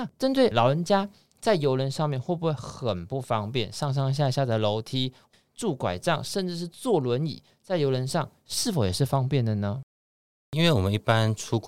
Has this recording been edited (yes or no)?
no